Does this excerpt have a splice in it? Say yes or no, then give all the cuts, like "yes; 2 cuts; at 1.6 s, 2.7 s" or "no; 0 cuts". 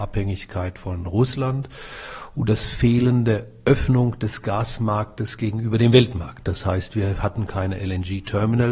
no; 0 cuts